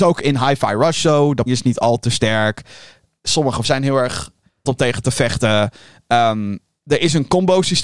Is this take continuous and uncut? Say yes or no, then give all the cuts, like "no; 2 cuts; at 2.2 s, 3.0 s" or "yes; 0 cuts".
no; 3 cuts; at 1.5 s, 3.6 s, 4.7 s